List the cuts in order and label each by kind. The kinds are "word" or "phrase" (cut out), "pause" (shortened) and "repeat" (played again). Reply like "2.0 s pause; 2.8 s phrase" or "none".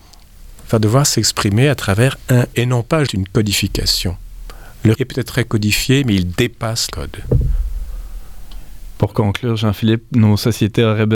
2.5 s word; 3.1 s word; 4.9 s word; 6.9 s word